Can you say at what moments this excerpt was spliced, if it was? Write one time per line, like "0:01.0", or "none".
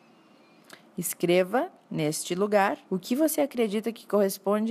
0:02.9